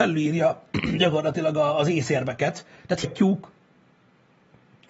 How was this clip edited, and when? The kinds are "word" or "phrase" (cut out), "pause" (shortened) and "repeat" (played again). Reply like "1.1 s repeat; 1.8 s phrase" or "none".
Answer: 3.0 s word